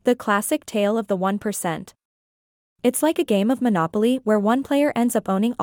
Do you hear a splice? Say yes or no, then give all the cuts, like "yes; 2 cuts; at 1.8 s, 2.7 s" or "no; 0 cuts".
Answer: no; 0 cuts